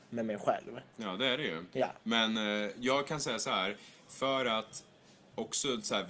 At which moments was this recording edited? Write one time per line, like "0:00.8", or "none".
none